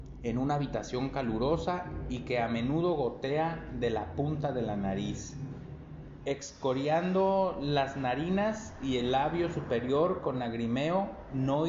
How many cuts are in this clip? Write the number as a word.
zero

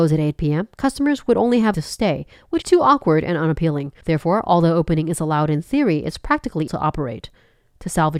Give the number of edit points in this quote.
four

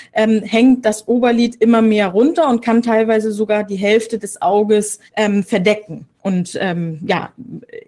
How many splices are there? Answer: two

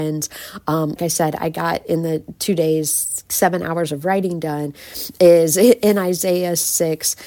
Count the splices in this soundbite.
one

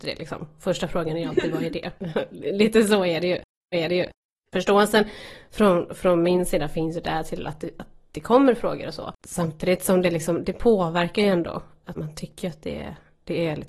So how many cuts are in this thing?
four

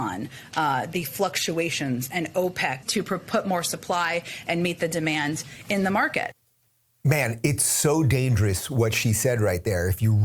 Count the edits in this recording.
one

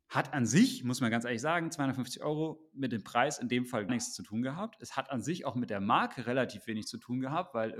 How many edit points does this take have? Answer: one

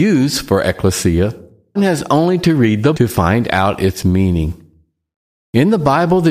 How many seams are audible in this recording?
two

